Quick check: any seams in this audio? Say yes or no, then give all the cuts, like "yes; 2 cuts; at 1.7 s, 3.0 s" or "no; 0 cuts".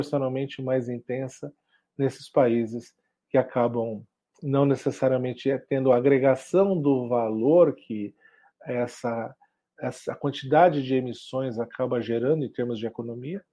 no; 0 cuts